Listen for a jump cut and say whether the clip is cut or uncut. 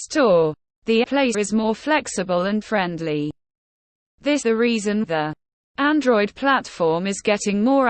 cut